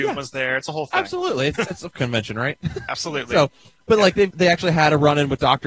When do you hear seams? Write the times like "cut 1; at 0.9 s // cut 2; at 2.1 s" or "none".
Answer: cut 1; at 1.6 s // cut 2; at 1.9 s // cut 3; at 2.9 s // cut 4; at 4.3 s